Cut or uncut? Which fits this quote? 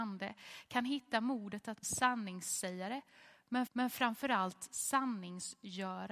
cut